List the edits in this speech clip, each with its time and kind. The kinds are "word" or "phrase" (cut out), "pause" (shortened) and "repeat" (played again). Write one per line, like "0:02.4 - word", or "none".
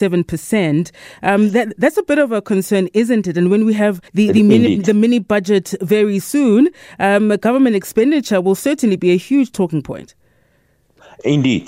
0:04.1 - pause